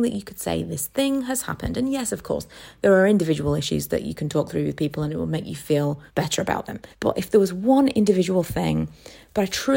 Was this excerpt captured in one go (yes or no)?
no